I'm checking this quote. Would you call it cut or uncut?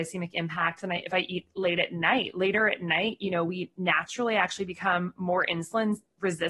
uncut